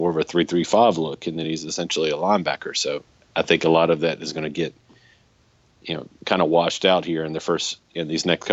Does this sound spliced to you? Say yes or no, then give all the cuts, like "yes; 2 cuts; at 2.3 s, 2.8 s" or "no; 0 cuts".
no; 0 cuts